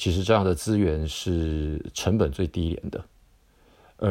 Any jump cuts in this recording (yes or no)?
no